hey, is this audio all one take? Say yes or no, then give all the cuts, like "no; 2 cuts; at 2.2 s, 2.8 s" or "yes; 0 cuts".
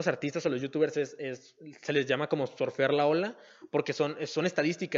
yes; 0 cuts